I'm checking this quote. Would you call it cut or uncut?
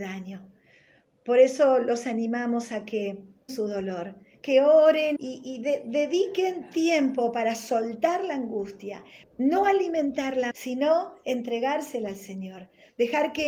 cut